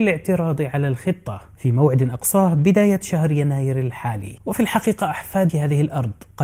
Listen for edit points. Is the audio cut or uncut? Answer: cut